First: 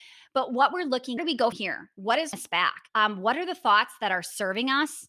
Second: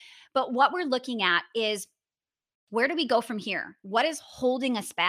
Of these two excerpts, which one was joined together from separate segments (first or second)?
first